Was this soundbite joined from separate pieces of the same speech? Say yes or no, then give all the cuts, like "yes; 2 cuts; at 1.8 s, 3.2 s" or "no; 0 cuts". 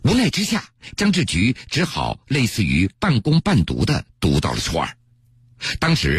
no; 0 cuts